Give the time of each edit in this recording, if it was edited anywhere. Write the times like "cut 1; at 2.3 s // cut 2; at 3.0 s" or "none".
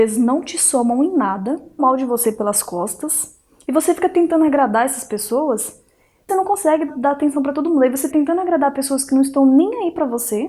cut 1; at 1.8 s // cut 2; at 6.3 s // cut 3; at 6.9 s // cut 4; at 8.1 s